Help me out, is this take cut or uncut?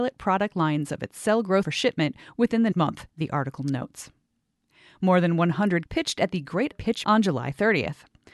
cut